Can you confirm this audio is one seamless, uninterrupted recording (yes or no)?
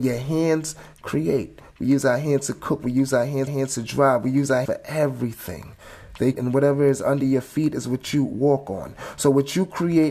no